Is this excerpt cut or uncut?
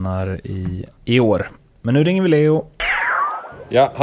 cut